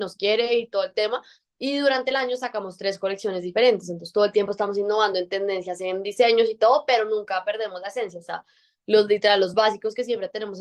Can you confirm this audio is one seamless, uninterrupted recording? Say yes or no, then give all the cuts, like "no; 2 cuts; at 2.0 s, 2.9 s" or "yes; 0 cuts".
yes; 0 cuts